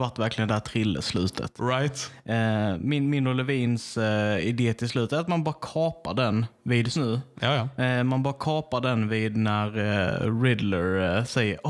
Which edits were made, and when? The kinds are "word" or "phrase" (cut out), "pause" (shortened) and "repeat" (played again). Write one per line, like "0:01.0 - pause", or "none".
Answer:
0:06.9 - word